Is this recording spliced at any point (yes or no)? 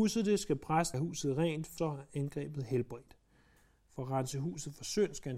yes